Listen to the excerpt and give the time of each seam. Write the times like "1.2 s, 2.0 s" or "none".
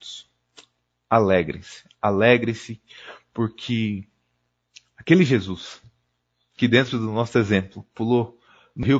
none